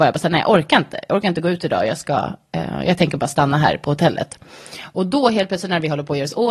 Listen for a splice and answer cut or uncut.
uncut